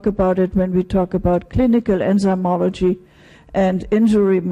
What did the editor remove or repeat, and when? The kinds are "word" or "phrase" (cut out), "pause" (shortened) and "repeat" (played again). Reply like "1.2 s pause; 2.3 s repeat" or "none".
none